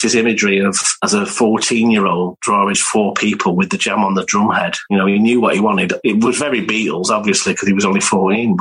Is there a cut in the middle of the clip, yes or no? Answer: yes